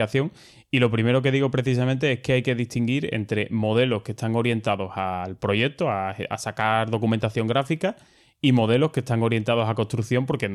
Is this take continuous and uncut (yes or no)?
yes